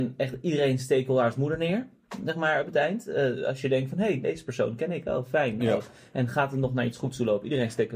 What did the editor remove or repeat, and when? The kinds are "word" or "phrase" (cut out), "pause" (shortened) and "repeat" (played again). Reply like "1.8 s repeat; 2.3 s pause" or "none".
none